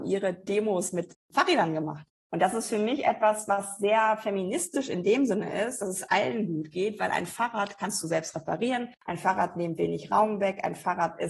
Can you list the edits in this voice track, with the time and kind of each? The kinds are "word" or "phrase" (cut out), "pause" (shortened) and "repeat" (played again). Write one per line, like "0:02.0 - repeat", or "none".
none